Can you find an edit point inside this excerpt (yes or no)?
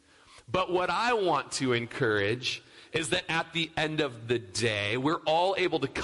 no